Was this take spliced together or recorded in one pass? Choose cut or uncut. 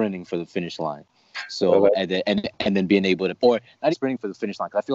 cut